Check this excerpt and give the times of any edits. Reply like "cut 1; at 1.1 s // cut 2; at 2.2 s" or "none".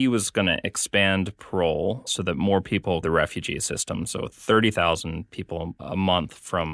cut 1; at 3.0 s